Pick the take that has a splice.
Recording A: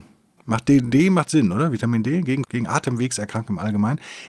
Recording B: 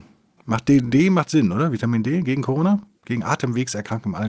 A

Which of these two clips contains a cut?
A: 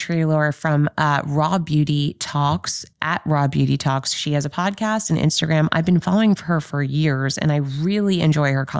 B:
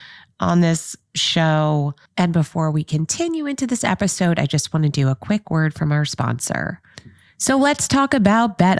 A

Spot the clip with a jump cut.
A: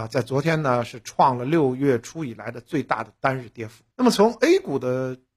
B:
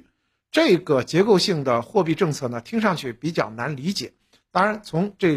A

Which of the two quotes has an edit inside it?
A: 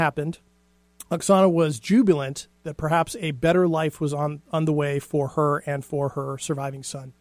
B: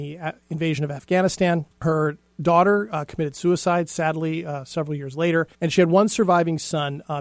B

